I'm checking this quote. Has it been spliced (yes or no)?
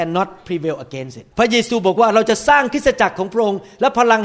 yes